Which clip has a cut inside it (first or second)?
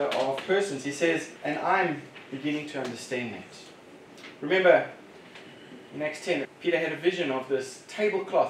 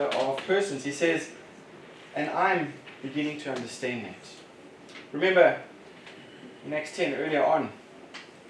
first